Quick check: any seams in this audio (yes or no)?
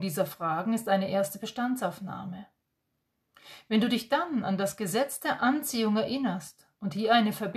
no